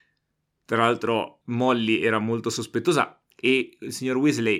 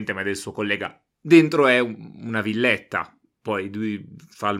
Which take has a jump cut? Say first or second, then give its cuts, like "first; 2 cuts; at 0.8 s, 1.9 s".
first; 2 cuts; at 1.4 s, 3.3 s